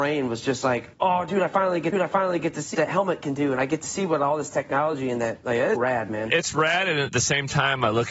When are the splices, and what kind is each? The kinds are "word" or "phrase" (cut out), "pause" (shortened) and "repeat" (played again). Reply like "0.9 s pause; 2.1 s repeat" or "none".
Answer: 1.9 s repeat; 2.7 s word; 5.8 s word